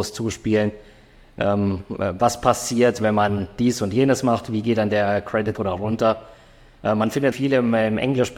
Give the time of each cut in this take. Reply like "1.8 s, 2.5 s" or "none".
5.5 s, 7.3 s